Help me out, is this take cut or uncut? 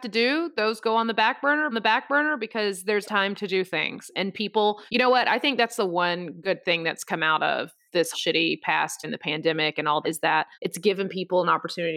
cut